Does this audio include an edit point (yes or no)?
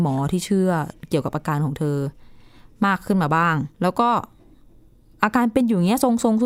yes